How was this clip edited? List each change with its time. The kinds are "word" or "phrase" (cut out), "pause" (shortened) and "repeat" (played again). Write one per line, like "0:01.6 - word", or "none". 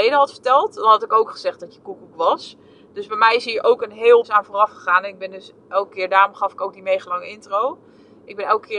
0:04.2 - word